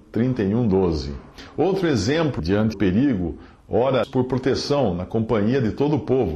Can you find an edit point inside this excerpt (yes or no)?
yes